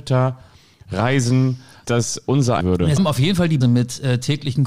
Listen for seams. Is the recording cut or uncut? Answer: cut